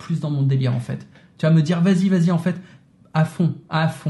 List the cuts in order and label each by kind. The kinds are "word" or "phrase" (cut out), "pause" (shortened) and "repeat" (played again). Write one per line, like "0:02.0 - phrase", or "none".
none